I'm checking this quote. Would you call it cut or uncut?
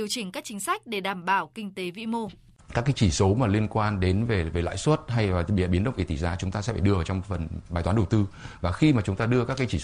uncut